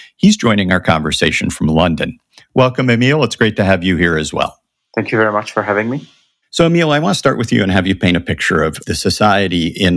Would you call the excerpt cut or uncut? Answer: uncut